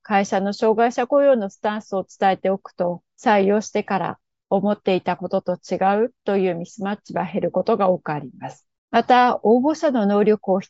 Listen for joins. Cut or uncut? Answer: cut